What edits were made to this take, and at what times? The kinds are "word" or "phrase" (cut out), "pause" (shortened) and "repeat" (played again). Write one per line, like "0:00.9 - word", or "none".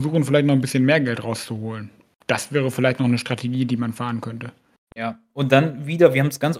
none